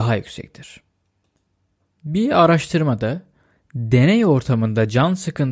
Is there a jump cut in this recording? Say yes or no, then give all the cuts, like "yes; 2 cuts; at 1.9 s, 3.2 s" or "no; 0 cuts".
no; 0 cuts